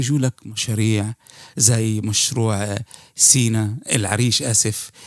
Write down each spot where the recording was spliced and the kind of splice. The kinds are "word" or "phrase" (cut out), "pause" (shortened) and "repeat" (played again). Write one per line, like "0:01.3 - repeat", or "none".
none